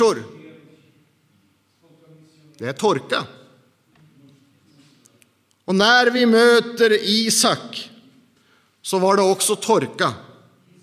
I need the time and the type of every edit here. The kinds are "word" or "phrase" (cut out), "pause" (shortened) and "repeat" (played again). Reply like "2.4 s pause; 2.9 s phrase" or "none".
none